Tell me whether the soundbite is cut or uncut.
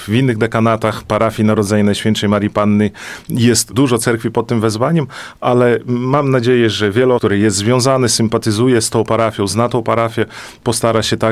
cut